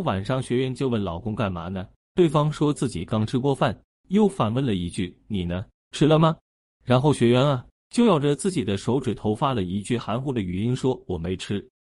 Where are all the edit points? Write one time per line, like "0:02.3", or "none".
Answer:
none